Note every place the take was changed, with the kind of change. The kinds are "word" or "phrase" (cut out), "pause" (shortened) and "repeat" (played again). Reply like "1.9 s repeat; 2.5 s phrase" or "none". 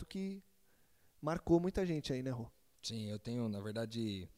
none